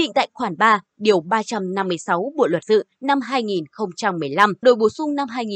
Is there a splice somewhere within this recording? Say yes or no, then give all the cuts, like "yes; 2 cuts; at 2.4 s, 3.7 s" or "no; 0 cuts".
yes; 2 cuts; at 2.6 s, 4.6 s